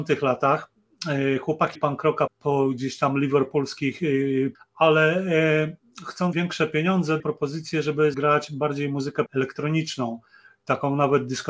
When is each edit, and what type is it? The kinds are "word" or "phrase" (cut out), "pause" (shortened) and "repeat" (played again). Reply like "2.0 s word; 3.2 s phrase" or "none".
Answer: 1.8 s word; 2.3 s word; 4.5 s word; 6.3 s word; 7.2 s word; 8.1 s word; 9.3 s word